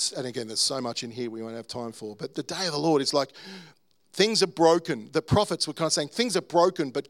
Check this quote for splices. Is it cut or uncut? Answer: uncut